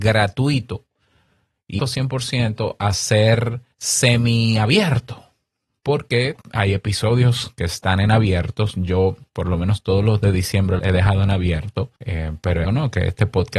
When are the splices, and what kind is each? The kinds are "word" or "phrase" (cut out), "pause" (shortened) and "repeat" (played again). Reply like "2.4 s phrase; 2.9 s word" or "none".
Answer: 1.8 s word; 3.7 s pause; 6.4 s pause; 10.8 s word; 12.0 s pause; 12.6 s word